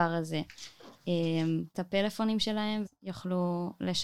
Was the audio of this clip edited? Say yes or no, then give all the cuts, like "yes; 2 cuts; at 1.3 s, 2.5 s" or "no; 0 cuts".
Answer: yes; 2 cuts; at 1.7 s, 2.9 s